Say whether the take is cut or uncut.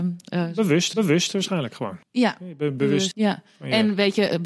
cut